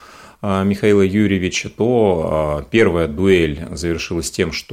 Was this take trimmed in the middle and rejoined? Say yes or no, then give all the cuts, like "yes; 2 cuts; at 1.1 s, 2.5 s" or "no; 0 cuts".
no; 0 cuts